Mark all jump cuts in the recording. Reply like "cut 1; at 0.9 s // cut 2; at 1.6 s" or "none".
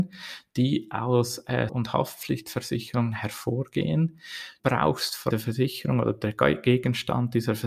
cut 1; at 1.7 s // cut 2; at 4.6 s // cut 3; at 5.3 s